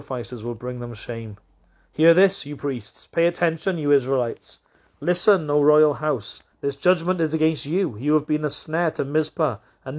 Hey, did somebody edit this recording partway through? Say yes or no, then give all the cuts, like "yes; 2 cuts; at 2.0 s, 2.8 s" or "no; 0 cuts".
yes; 1 cut; at 6.5 s